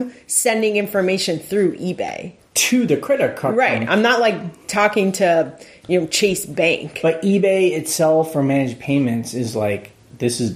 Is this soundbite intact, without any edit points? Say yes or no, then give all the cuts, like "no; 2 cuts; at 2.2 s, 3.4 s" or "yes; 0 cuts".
yes; 0 cuts